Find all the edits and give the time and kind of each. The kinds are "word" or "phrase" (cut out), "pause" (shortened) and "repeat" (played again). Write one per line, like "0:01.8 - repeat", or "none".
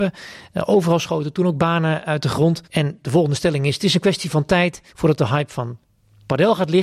0:02.6 - pause
0:04.9 - pause